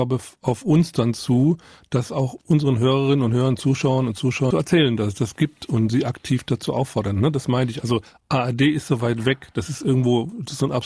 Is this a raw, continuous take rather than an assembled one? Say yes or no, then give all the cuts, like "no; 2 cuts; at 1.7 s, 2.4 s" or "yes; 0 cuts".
no; 1 cut; at 4.5 s